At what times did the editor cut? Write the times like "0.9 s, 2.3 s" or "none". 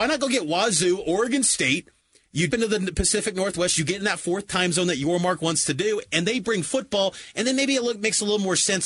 2.5 s